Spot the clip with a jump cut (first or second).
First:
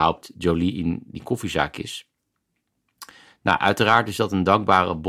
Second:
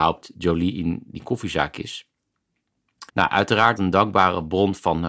second